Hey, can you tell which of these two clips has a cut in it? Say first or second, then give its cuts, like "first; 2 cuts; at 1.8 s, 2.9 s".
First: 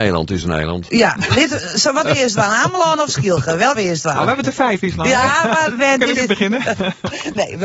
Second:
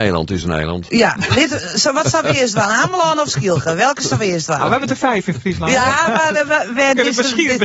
first; 5 cuts; at 2.0 s, 3.8 s, 4.8 s, 5.7 s, 6.2 s